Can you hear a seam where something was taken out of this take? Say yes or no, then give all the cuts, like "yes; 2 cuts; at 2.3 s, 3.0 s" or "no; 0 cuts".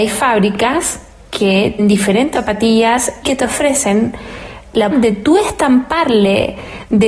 yes; 4 cuts; at 1.8 s, 2.3 s, 3.2 s, 4.9 s